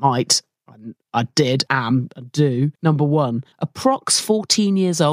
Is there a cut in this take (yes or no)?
yes